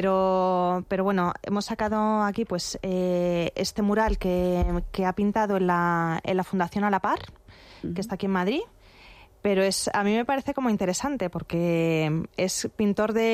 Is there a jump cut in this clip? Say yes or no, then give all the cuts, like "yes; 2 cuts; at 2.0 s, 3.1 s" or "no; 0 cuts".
no; 0 cuts